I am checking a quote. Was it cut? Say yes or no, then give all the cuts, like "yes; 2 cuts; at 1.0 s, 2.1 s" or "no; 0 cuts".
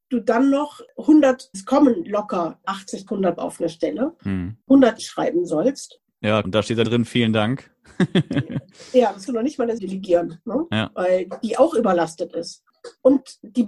yes; 9 cuts; at 1.5 s, 2.6 s, 3.1 s, 3.4 s, 5.0 s, 6.4 s, 6.8 s, 9.3 s, 9.8 s